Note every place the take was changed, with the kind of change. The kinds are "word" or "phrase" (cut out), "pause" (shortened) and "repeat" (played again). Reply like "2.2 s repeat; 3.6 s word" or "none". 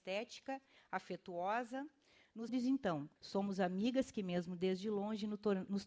2.5 s word; 3.2 s pause